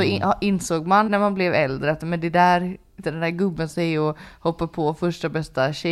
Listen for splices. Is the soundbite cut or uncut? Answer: cut